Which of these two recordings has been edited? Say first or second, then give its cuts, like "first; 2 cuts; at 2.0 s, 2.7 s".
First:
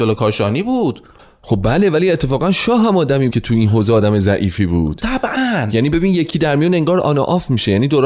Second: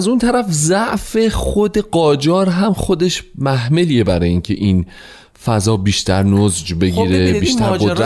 first; 1 cut; at 3.3 s